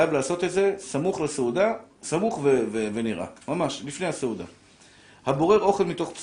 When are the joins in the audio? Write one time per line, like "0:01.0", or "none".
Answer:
none